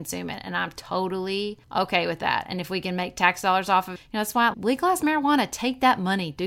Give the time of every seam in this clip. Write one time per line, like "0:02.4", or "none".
0:01.6
0:04.0
0:04.5